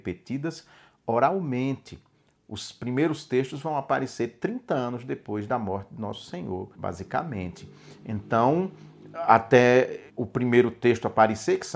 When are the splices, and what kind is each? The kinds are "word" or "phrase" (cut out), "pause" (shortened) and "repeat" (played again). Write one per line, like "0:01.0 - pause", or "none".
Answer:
0:06.7 - pause
0:10.1 - pause

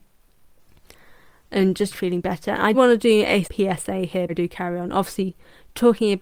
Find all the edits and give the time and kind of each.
0:01.9 - word
0:02.7 - word
0:03.4 - word
0:04.3 - word

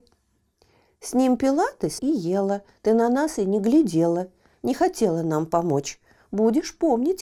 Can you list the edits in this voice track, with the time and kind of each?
0:02.0 - word

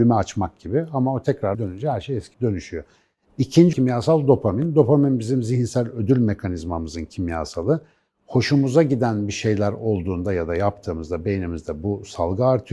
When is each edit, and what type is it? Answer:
0:01.5 - word
0:02.3 - word
0:03.7 - word

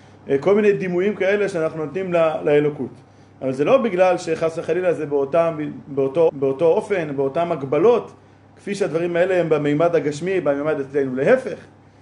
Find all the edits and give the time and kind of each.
0:06.3 - repeat

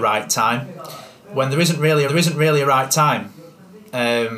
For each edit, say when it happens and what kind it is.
0:02.1 - repeat

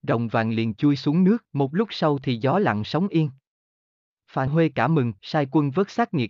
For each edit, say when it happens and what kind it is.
0:01.4 - pause
0:04.5 - word
0:05.2 - pause

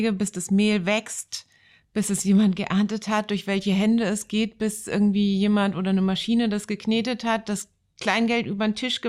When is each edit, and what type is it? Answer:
none

